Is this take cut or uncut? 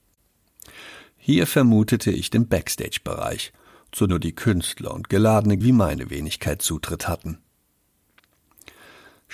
cut